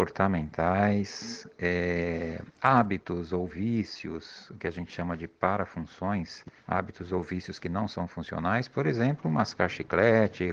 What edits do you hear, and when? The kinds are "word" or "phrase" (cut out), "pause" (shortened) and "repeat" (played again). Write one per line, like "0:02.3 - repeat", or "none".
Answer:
0:06.6 - pause